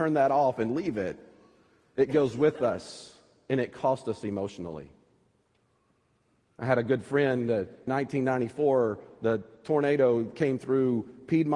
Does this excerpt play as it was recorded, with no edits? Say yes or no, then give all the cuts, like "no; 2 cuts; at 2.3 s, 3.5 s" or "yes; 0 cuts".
no; 1 cut; at 7.9 s